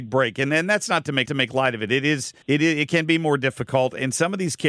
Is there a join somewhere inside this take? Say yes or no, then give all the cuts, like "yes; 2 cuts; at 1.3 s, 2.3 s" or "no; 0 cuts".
yes; 2 cuts; at 1.3 s, 2.4 s